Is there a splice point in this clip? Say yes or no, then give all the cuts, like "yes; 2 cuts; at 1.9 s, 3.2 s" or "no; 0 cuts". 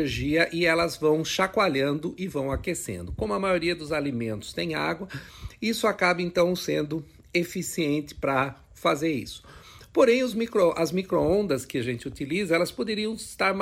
no; 0 cuts